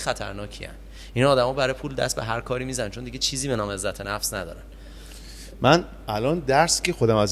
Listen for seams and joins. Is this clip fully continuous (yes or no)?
yes